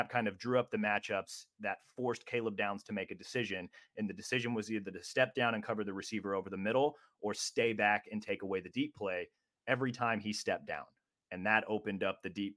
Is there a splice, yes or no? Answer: no